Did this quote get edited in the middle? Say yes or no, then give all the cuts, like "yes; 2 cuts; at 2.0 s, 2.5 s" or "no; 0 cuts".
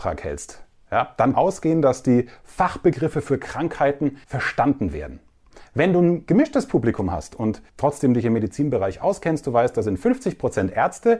yes; 3 cuts; at 1.3 s, 4.2 s, 7.7 s